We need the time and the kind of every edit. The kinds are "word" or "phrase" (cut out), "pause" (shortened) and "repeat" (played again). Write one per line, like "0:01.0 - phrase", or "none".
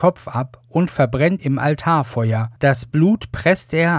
0:01.4 - word
0:02.6 - pause